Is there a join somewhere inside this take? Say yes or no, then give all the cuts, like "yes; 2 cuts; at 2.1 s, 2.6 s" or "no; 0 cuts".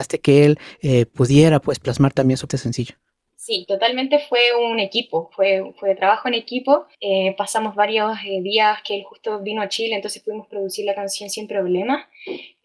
yes; 2 cuts; at 2.5 s, 6.9 s